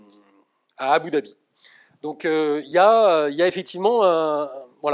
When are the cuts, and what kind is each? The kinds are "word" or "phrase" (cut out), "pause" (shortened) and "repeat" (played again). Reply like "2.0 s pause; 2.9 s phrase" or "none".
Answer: none